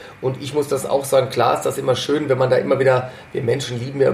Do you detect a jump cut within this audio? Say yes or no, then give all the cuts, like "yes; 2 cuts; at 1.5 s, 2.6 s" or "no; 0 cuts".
no; 0 cuts